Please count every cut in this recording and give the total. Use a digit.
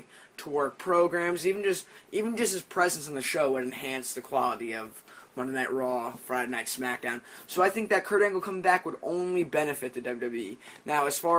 0